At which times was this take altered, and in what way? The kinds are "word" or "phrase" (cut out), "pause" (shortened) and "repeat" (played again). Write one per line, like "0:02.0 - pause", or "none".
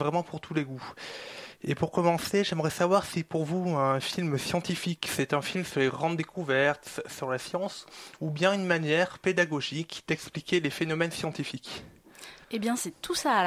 0:12.4 - pause